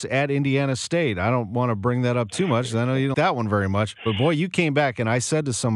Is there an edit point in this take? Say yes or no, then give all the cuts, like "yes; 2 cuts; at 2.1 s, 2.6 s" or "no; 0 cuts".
yes; 1 cut; at 3.1 s